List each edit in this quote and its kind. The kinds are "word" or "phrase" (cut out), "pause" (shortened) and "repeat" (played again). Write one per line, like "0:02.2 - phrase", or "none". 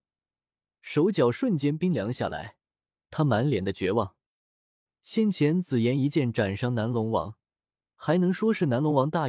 none